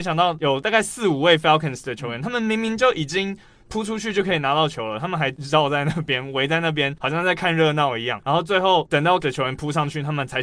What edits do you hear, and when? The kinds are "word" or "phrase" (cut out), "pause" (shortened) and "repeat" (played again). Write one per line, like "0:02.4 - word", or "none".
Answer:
0:09.2 - word